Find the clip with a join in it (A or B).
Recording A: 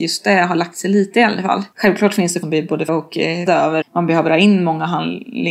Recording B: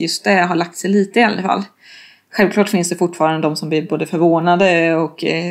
A